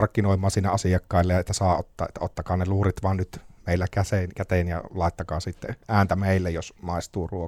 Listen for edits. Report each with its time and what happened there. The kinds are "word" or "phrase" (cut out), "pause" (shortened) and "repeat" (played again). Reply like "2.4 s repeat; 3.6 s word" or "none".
none